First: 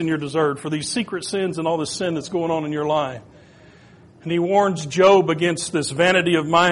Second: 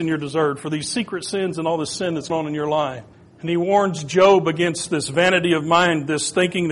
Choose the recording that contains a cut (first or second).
second